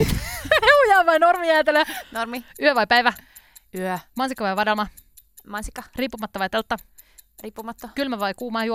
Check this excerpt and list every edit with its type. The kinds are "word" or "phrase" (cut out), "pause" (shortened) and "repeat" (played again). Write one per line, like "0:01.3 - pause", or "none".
none